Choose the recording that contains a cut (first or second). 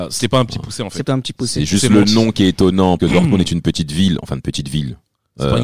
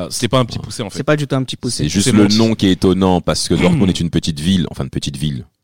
first